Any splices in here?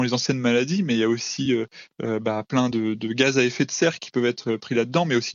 no; 0 cuts

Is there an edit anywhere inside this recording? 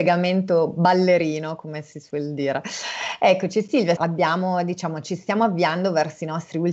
yes; 1 cut; at 4.0 s

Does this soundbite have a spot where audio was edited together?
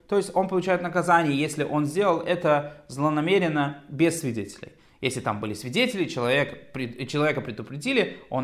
no; 0 cuts

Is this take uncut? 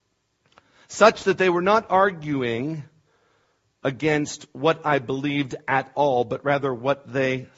yes; 0 cuts

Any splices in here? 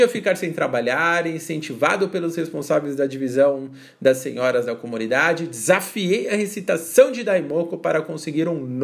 no; 0 cuts

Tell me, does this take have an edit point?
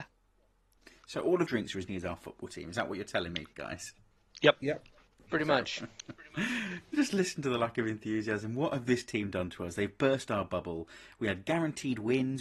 yes; 2 cuts; at 1.5 s, 1.9 s

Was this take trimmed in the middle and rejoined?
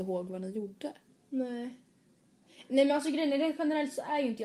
no; 0 cuts

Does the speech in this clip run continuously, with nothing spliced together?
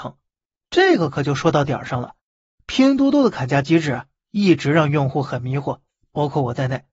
yes; 0 cuts

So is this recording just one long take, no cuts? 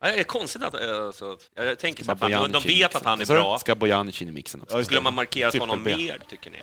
no; 1 cut; at 1.5 s

